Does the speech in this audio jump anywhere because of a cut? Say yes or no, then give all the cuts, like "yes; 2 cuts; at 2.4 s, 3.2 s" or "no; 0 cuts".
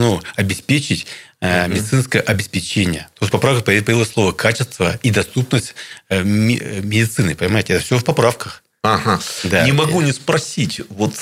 no; 0 cuts